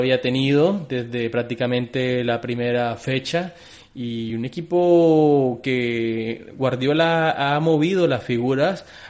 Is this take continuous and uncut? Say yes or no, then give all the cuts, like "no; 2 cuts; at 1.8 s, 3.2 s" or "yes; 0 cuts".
yes; 0 cuts